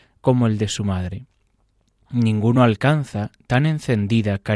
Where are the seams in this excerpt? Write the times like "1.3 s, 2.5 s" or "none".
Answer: none